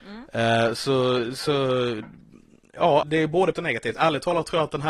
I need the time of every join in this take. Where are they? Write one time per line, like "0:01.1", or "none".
0:03.0
0:03.5